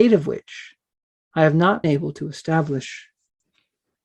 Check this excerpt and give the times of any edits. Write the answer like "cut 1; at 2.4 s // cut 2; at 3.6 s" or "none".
cut 1; at 1.8 s